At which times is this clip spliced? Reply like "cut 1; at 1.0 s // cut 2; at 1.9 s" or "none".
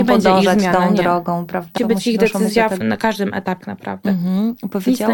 cut 1; at 1.8 s // cut 2; at 2.8 s // cut 3; at 3.6 s